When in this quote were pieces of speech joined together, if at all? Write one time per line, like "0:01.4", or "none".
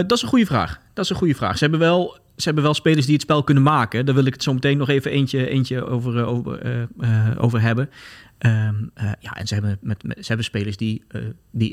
none